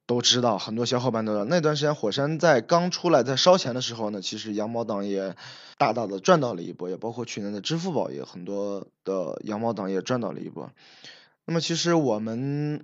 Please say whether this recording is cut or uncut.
cut